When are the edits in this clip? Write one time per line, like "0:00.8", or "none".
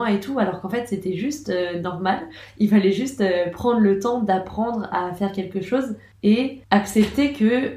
none

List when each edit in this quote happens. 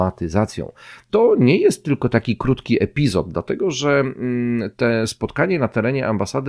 none

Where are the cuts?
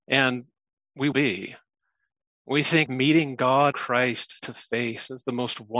0:01.1
0:02.9
0:03.7
0:04.4

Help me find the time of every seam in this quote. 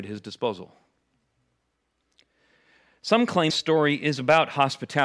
0:03.5

